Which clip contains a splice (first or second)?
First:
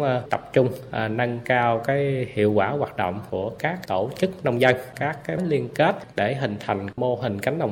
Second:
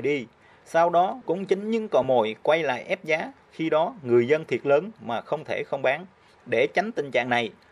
first